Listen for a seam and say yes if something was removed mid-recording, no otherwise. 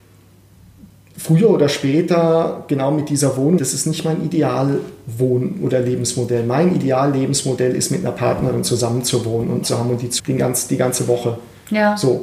yes